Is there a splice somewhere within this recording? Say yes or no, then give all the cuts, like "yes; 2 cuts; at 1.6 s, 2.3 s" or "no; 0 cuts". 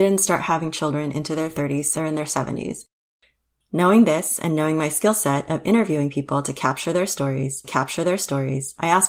yes; 2 cuts; at 1.9 s, 7.6 s